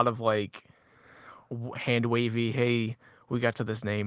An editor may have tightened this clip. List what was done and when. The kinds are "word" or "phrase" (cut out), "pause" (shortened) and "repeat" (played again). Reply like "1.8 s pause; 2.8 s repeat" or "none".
none